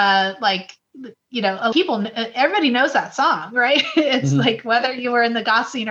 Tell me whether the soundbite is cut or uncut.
cut